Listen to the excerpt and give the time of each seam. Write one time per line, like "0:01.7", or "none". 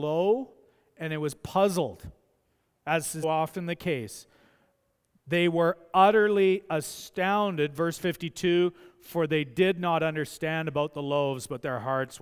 0:03.2